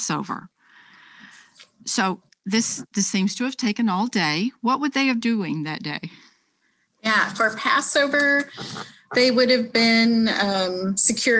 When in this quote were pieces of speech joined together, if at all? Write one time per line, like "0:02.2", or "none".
0:05.2